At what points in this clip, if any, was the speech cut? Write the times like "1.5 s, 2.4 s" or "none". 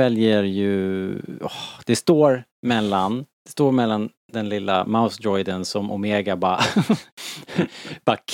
3.3 s